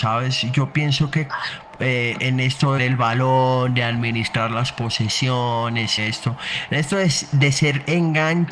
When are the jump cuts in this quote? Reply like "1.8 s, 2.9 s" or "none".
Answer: 1.3 s, 2.8 s, 6.0 s